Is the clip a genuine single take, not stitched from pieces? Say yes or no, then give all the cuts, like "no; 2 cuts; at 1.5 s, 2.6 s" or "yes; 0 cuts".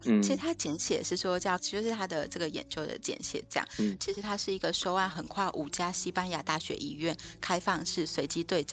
no; 1 cut; at 1.6 s